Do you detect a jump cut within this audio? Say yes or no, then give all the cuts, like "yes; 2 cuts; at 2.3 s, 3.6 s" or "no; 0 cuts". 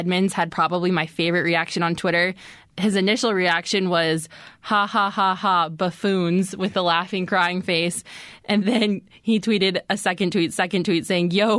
yes; 1 cut; at 10.5 s